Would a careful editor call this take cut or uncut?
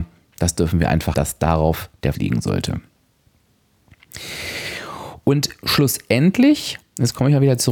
cut